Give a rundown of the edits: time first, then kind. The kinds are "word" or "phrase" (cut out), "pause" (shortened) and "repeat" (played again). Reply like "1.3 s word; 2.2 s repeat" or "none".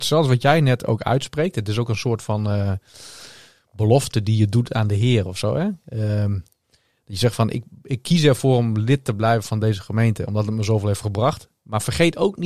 none